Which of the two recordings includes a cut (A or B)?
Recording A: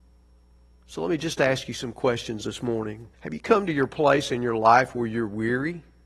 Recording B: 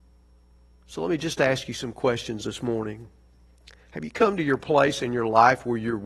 A